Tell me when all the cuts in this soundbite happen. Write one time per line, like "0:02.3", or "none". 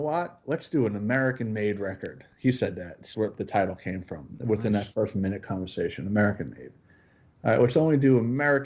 0:03.1